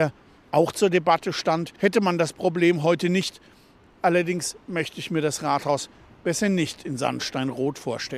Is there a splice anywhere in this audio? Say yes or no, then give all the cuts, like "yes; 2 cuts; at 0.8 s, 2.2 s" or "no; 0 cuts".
yes; 1 cut; at 1.8 s